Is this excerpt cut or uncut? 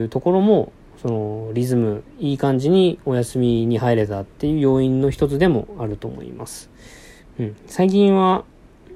uncut